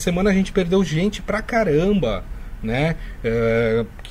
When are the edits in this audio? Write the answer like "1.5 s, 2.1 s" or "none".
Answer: none